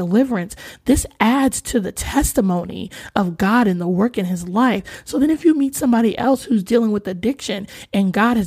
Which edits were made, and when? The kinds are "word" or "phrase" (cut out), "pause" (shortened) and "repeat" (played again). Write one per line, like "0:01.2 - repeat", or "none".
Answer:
none